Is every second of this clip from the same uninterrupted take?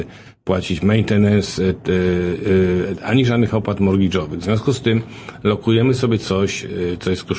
yes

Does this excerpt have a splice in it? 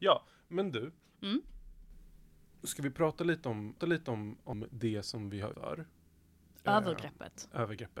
yes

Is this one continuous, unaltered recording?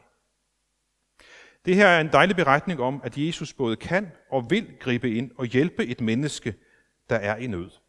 yes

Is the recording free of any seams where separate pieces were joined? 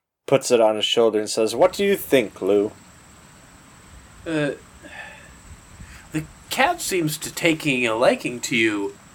yes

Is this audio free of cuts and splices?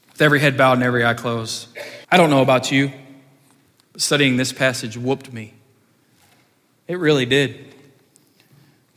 no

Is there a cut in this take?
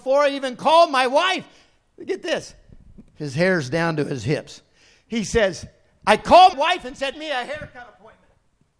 yes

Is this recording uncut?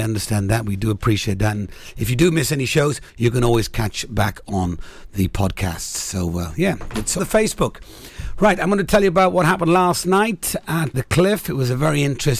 no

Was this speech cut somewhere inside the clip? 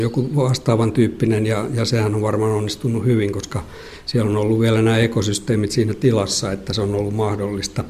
no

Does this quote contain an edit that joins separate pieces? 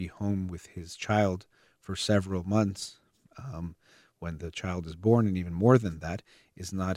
no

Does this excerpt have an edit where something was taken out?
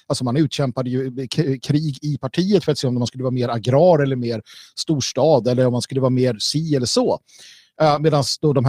no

